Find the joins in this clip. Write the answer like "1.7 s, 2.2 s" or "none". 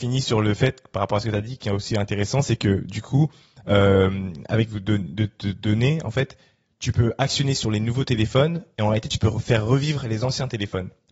4.7 s